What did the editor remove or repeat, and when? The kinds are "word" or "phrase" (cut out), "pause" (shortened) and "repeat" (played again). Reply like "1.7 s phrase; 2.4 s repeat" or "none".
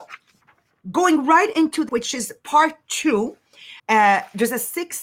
1.9 s word; 3.8 s pause